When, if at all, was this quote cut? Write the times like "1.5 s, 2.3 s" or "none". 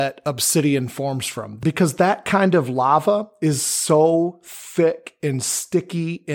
none